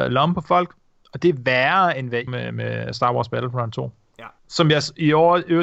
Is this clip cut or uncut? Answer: cut